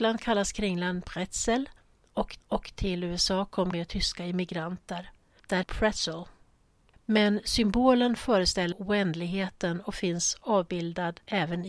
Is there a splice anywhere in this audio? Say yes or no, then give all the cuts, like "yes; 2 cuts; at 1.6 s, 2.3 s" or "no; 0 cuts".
yes; 4 cuts; at 2.4 s, 3.7 s, 5.6 s, 8.7 s